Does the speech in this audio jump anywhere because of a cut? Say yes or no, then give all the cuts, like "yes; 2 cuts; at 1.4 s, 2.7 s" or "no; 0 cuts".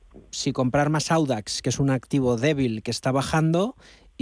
no; 0 cuts